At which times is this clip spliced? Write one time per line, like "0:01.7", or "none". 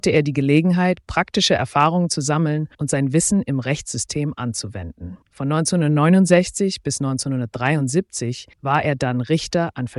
0:02.7
0:05.2
0:08.5